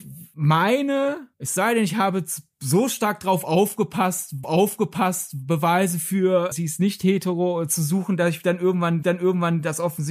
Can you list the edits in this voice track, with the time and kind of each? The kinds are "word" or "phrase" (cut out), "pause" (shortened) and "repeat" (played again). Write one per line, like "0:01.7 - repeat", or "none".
0:01.3 - pause
0:04.4 - repeat
0:06.5 - word
0:09.0 - repeat